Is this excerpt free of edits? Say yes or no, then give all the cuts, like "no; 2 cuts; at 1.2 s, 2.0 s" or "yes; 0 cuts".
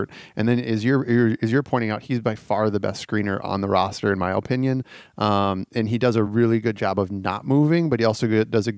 yes; 0 cuts